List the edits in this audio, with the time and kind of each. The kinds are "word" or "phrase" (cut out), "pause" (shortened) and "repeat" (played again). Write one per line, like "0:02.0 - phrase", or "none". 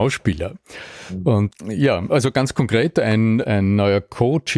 none